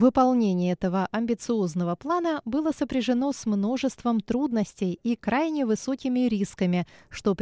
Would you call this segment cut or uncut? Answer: uncut